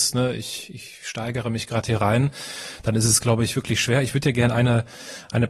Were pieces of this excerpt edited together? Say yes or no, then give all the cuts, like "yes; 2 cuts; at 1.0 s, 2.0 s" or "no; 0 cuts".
no; 0 cuts